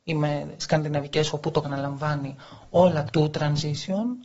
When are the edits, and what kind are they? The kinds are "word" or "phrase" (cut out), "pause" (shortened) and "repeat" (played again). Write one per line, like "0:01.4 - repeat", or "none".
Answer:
0:01.3 - word
0:01.6 - word
0:03.1 - word